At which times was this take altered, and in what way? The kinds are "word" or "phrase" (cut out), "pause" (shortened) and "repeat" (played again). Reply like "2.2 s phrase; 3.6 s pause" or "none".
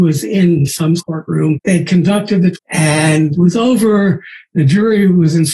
1.0 s word; 1.5 s word; 2.5 s word